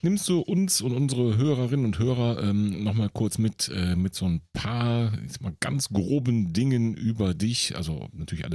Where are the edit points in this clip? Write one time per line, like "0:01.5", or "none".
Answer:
none